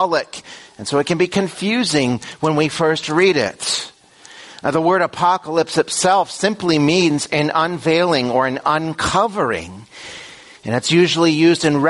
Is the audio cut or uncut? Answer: uncut